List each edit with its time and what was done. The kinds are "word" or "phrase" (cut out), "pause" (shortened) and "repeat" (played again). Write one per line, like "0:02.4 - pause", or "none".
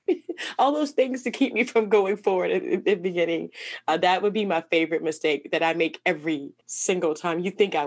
0:06.6 - pause